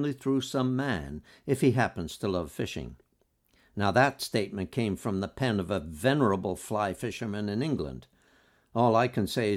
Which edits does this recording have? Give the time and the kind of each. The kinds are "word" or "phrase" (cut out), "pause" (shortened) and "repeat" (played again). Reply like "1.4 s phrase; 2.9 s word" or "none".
none